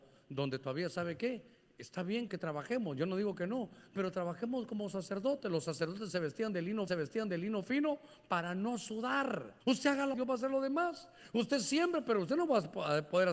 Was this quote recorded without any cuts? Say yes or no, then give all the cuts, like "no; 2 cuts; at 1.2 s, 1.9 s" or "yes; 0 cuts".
no; 4 cuts; at 2.3 s, 6.9 s, 9.6 s, 10.1 s